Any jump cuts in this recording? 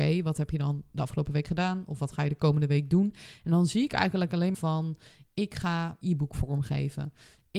yes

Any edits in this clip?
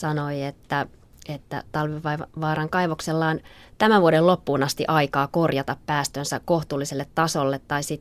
no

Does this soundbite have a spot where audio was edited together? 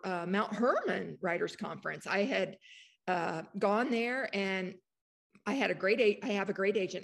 no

